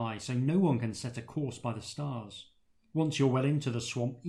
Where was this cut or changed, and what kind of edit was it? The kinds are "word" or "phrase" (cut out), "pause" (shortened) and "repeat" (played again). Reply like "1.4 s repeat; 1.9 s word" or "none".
none